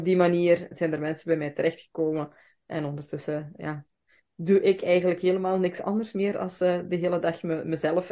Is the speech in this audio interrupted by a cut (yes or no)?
no